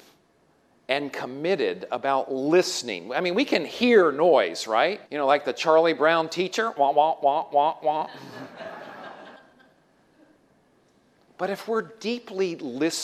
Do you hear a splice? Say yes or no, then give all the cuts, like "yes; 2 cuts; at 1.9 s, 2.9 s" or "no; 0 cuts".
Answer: yes; 2 cuts; at 5.1 s, 9.4 s